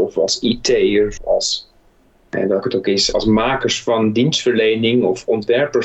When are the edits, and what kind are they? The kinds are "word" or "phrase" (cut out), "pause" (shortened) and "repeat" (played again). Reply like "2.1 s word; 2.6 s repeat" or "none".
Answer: 1.2 s word; 2.6 s word; 3.1 s word